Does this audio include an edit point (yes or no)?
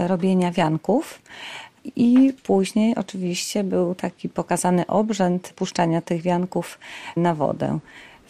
no